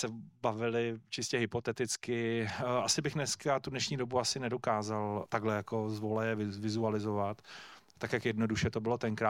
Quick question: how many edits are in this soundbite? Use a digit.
1